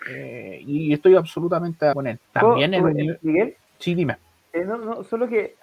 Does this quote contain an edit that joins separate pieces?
yes; 3 cuts; at 1.9 s, 2.2 s, 3.7 s

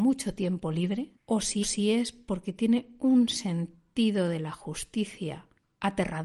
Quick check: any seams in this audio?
yes; 2 cuts; at 1.2 s, 1.6 s

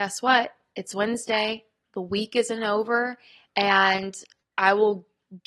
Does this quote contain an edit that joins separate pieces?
no; 0 cuts

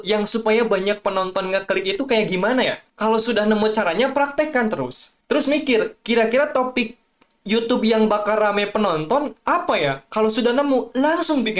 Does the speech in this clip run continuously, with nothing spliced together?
yes; 0 cuts

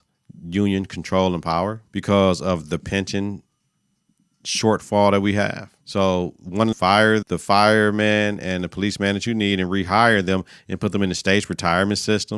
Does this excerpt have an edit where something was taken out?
yes; 4 cuts; at 1.9 s, 5.8 s, 6.7 s, 7.2 s

